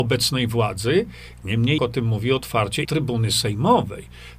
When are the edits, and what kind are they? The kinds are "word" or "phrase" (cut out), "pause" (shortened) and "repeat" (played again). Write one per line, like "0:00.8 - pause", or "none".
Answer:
0:01.8 - word
0:02.8 - phrase